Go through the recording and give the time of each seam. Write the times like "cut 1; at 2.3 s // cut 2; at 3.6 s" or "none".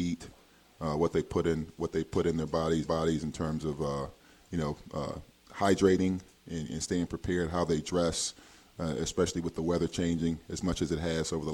cut 1; at 2.8 s